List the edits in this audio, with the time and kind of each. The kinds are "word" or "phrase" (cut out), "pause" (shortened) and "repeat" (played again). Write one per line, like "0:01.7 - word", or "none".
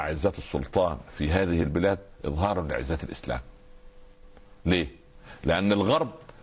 none